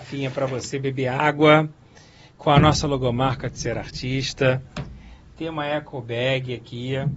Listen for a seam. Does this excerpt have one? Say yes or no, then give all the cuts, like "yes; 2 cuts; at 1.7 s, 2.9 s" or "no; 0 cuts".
no; 0 cuts